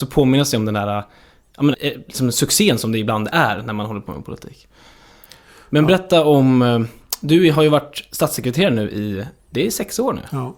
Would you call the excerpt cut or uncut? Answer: cut